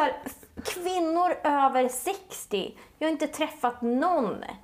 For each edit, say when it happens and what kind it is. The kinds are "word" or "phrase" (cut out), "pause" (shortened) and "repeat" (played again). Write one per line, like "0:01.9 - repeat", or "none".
none